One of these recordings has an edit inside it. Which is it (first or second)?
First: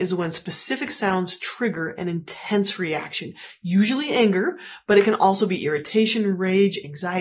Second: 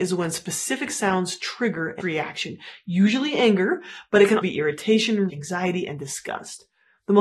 second